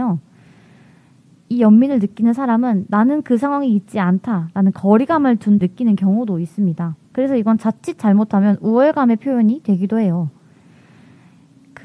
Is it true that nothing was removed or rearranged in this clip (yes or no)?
no